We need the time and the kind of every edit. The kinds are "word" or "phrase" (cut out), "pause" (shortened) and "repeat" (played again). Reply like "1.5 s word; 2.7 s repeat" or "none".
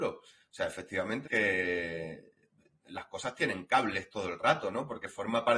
1.2 s word